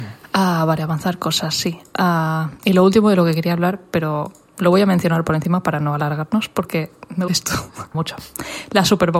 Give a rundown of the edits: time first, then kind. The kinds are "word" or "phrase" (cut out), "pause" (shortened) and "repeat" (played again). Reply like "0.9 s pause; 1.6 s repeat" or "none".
7.3 s phrase; 7.9 s word